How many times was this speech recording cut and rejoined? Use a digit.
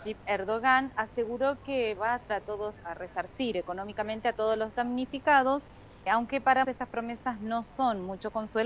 4